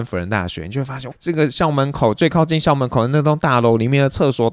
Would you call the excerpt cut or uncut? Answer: cut